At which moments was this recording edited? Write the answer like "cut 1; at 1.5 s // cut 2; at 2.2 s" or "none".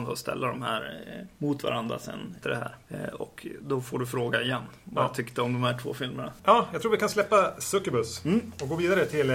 cut 1; at 2.4 s